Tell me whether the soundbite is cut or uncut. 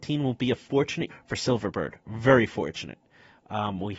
cut